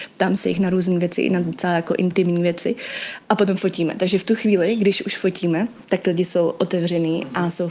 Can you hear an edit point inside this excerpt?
yes; 1 cut; at 3.2 s

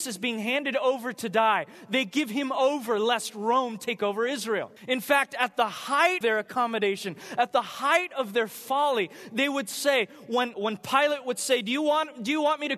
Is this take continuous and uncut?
no; 3 cuts; at 4.8 s, 6.2 s, 10.5 s

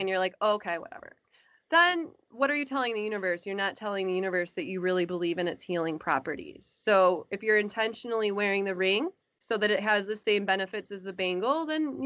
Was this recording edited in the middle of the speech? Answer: yes; 1 cut; at 9.2 s

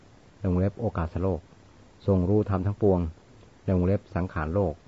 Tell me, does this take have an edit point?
no; 0 cuts

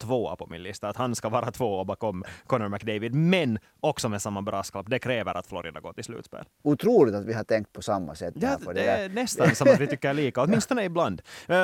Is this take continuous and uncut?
yes; 0 cuts

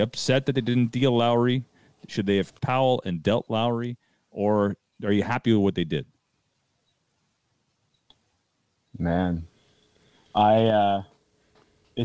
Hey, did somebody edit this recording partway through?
yes; 1 cut; at 2.6 s

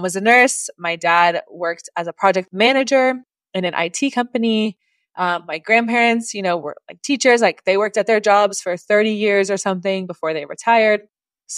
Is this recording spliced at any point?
no; 0 cuts

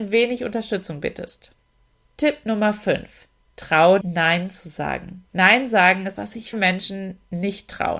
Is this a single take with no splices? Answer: no; 5 cuts; at 1.9 s, 4.0 s, 5.3 s, 6.1 s, 6.5 s

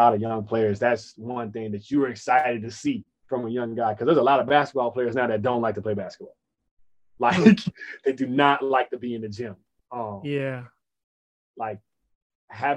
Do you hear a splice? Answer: no; 0 cuts

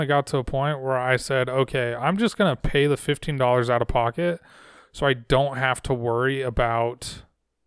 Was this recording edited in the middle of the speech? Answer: no; 0 cuts

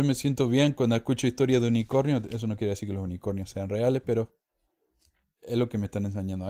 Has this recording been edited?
no; 0 cuts

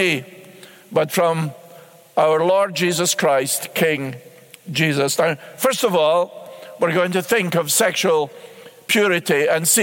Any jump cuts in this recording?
no; 0 cuts

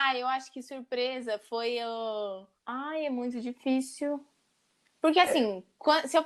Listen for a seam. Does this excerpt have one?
yes; 1 cut; at 2.6 s

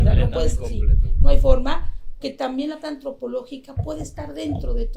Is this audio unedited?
no; 2 cuts; at 2.2 s, 2.8 s

